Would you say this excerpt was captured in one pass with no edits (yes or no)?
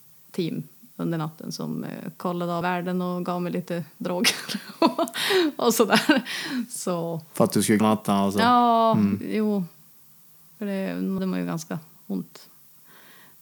no